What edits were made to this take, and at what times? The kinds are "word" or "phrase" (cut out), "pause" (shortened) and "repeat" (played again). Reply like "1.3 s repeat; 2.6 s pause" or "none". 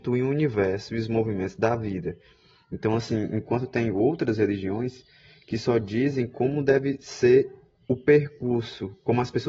none